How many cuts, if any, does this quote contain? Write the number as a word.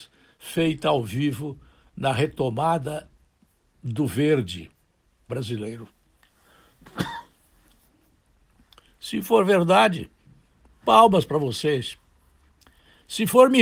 one